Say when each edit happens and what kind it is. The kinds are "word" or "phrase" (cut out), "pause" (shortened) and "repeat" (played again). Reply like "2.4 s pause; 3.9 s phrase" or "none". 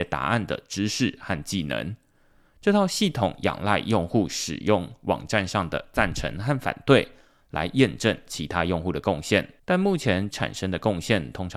9.6 s pause; 10.3 s word

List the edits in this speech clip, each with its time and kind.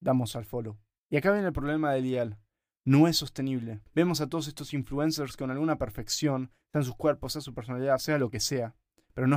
3.8 s pause

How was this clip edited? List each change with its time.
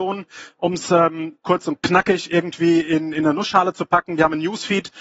none

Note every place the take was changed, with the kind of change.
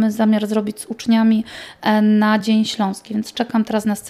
none

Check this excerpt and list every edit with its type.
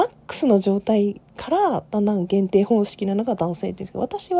1.3 s pause

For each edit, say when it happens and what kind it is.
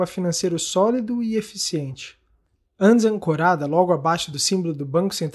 none

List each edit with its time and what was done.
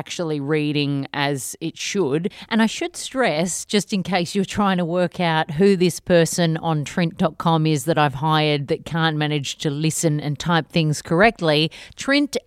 none

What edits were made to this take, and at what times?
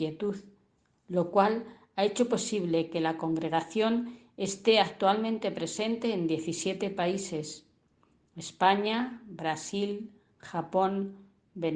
none

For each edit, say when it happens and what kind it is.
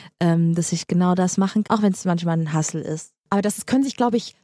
1.6 s word

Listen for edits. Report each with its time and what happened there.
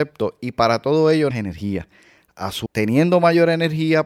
1.3 s word; 2.7 s word

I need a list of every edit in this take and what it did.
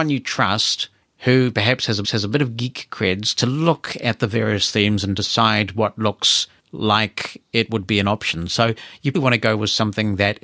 1.0 s pause; 2.0 s repeat; 6.6 s pause; 9.1 s word

